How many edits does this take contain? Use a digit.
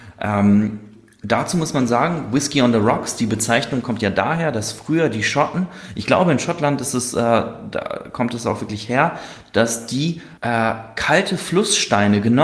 1